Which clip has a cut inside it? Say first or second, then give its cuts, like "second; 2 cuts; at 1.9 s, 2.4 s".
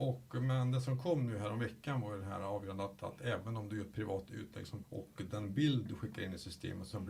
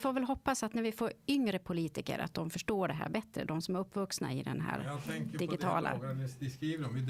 first; 1 cut; at 4.8 s